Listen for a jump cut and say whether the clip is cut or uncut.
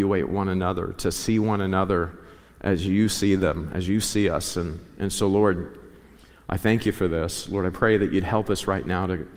uncut